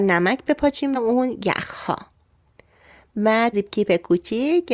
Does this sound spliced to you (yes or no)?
yes